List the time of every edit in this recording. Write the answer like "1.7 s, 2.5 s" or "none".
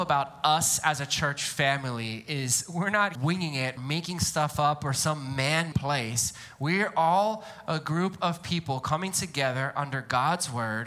3.1 s, 3.8 s, 5.7 s